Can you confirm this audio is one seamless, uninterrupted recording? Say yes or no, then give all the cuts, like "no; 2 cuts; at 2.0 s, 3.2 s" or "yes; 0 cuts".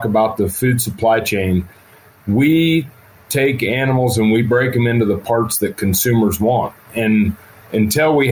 yes; 0 cuts